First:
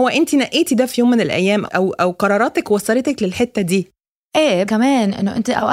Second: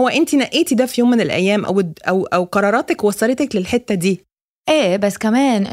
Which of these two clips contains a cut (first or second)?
first